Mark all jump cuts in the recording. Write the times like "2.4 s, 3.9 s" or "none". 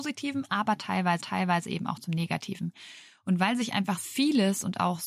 1.2 s, 4.0 s